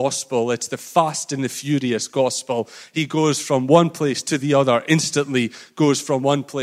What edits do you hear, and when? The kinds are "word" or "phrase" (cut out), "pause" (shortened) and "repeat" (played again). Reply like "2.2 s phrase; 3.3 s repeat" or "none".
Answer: none

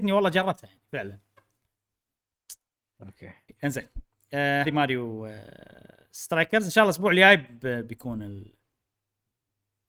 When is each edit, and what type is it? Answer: 3.5 s word; 4.6 s word

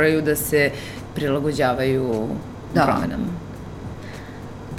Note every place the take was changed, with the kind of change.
2.7 s word

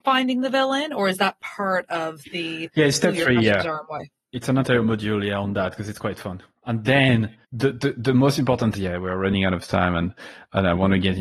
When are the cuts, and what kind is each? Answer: 7.4 s pause; 8.7 s phrase

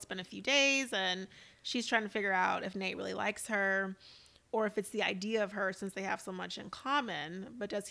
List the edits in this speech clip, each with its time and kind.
none

